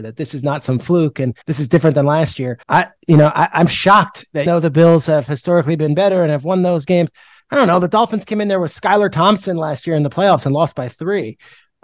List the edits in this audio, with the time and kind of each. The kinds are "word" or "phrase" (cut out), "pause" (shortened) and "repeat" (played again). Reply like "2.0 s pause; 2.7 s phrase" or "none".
1.4 s pause; 2.6 s pause; 4.5 s word